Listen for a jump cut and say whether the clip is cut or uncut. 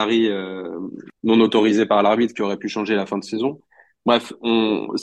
uncut